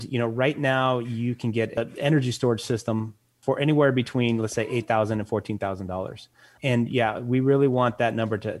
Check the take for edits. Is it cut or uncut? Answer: uncut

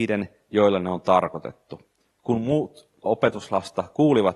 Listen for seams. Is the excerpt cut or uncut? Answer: cut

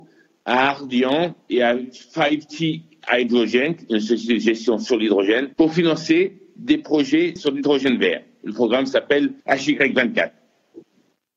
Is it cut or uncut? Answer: cut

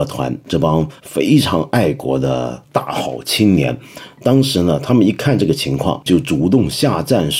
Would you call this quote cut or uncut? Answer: cut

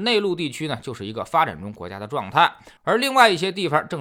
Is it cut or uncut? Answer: cut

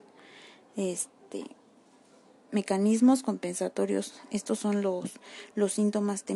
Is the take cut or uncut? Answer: uncut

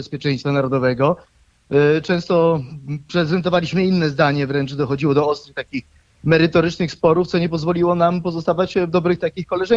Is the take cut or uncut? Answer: uncut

